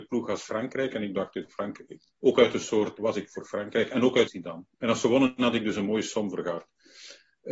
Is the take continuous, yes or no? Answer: no